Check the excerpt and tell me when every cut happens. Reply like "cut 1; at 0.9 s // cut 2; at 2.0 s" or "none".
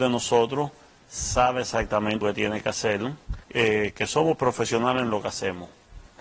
cut 1; at 2.2 s // cut 2; at 3.4 s